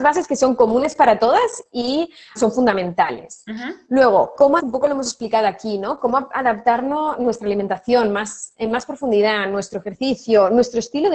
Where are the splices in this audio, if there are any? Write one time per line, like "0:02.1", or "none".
0:02.4
0:04.6